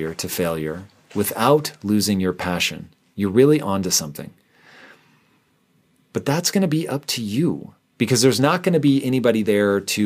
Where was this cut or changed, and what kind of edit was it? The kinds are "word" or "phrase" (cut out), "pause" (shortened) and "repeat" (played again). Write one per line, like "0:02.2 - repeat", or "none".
none